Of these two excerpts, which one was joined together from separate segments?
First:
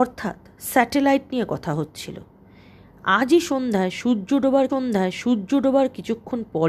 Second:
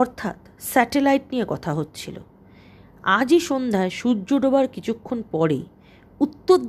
first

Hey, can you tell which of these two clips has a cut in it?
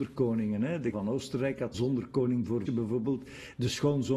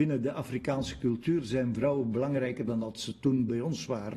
first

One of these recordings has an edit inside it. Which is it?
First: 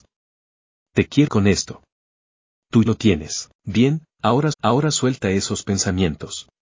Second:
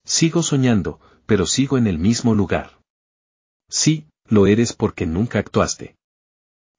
first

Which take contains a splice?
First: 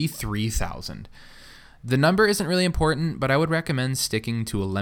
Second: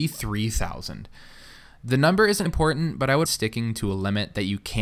second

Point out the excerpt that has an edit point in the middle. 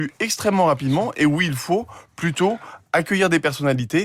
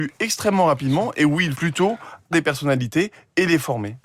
second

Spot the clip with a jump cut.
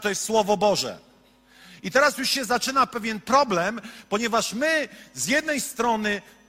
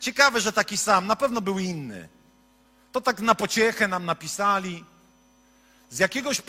second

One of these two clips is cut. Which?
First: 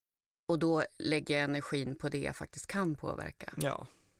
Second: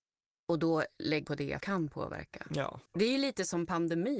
second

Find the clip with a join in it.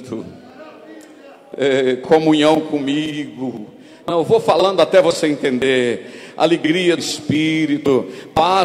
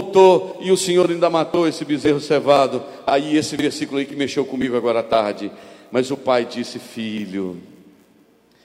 first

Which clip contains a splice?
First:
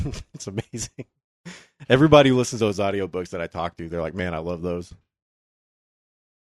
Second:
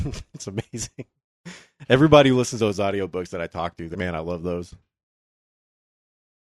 second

